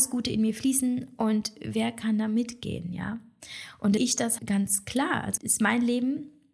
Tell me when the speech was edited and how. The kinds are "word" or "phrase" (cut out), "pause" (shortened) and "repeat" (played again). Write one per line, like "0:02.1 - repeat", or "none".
0:04.0 - phrase
0:04.4 - word
0:05.4 - word